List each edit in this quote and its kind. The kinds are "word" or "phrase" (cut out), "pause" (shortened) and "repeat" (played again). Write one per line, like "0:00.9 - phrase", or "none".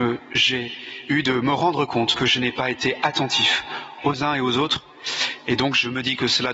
none